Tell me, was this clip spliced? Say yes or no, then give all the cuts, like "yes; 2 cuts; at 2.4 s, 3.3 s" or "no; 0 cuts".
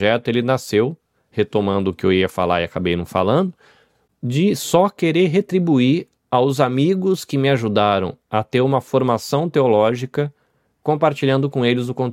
no; 0 cuts